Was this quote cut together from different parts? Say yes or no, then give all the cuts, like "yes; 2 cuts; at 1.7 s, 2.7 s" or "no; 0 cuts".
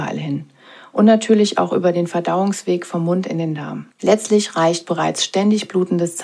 yes; 1 cut; at 3.9 s